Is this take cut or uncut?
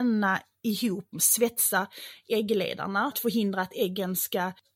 cut